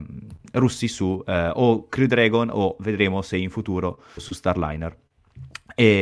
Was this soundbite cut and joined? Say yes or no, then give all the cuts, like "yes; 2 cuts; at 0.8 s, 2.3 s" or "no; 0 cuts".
yes; 1 cut; at 4.2 s